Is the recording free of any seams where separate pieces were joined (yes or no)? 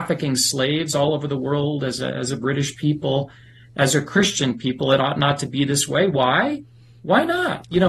yes